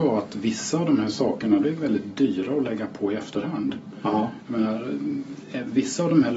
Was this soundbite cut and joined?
yes; 1 cut; at 1.6 s

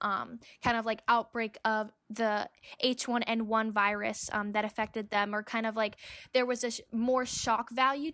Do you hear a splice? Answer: no; 0 cuts

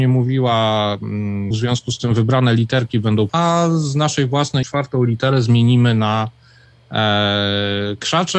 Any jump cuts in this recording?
yes; 3 cuts; at 1.5 s, 3.3 s, 4.6 s

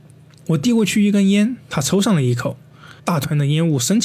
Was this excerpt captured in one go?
no; 1 cut; at 3.0 s

